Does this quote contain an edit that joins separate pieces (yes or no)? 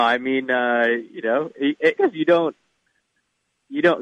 yes